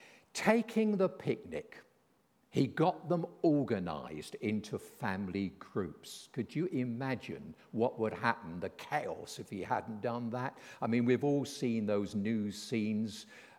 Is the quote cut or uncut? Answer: uncut